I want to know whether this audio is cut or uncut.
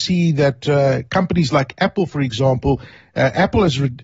uncut